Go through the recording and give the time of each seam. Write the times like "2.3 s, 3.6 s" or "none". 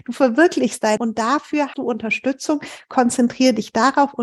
1.0 s, 1.7 s